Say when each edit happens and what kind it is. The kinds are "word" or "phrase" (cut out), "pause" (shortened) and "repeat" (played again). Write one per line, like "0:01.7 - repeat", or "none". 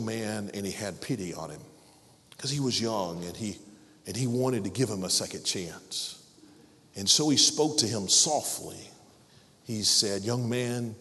none